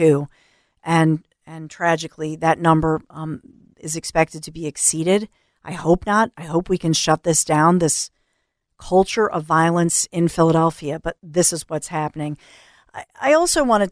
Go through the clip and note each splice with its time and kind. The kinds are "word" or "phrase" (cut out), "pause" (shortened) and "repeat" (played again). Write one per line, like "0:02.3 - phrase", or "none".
none

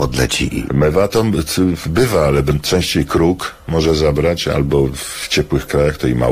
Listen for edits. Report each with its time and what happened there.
none

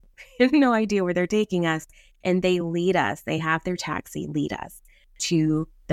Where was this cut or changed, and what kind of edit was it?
none

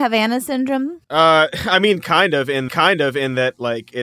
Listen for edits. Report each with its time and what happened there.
0:01.0 - pause
0:02.7 - repeat

